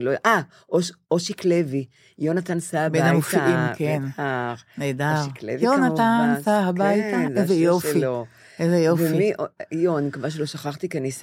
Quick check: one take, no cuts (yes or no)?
yes